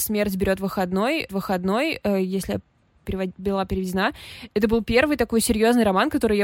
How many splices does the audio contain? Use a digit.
2